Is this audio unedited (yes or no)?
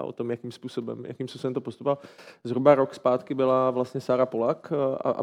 yes